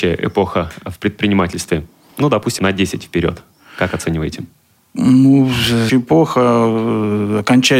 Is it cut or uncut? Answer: cut